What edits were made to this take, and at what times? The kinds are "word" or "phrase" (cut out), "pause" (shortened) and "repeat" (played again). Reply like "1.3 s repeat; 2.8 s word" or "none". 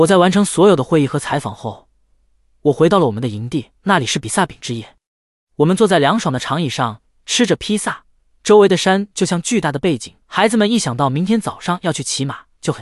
3.8 s pause; 10.2 s pause